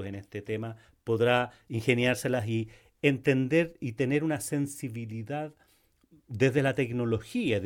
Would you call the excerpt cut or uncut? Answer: uncut